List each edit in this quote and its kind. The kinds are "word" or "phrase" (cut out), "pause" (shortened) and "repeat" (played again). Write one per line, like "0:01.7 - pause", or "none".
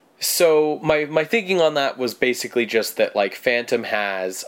none